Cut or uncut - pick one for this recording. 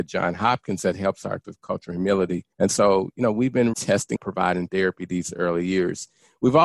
cut